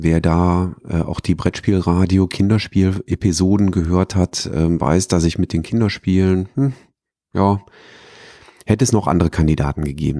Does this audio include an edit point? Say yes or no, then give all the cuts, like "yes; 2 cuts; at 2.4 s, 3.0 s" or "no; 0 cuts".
no; 0 cuts